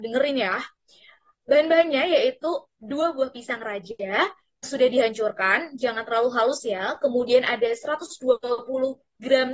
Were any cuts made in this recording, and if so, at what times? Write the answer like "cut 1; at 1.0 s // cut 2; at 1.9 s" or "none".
cut 1; at 4.6 s

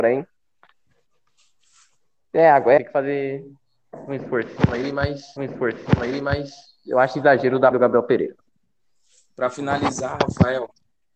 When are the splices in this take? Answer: cut 1; at 2.8 s // cut 2; at 5.4 s // cut 3; at 7.7 s

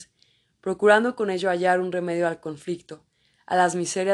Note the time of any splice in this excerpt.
none

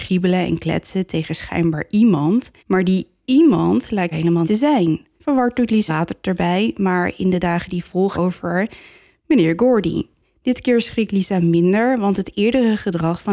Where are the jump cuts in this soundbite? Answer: cut 1; at 2.6 s // cut 2; at 4.1 s // cut 3; at 4.4 s // cut 4; at 5.2 s // cut 5; at 5.9 s // cut 6; at 8.1 s // cut 7; at 10.2 s

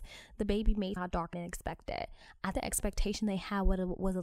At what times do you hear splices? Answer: cut 1; at 1.0 s // cut 2; at 1.3 s // cut 3; at 2.5 s

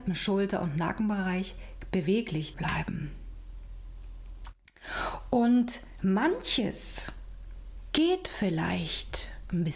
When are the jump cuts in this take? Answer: cut 1; at 2.5 s

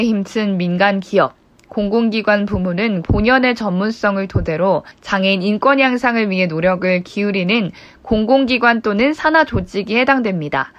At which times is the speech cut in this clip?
cut 1; at 3.0 s // cut 2; at 4.9 s

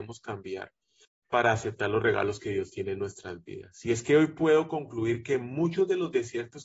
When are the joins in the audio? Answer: cut 1; at 1.0 s

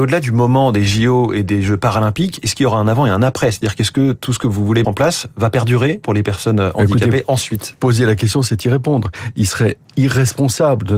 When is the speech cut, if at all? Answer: cut 1; at 4.8 s // cut 2; at 6.0 s

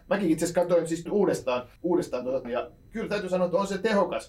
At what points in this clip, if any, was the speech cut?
cut 1; at 1.1 s // cut 2; at 1.8 s // cut 3; at 2.4 s

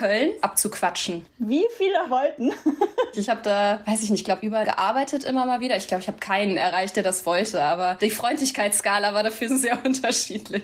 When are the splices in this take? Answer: cut 1; at 4.6 s

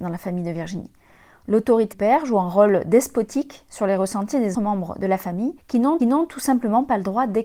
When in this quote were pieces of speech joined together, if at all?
cut 1; at 1.9 s // cut 2; at 4.5 s // cut 3; at 5.6 s // cut 4; at 6.0 s

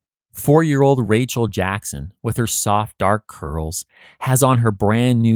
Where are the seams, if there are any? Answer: none

